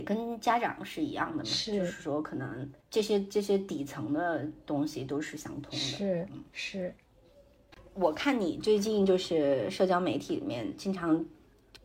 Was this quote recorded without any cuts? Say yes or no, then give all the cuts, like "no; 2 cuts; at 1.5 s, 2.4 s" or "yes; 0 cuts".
no; 1 cut; at 2.8 s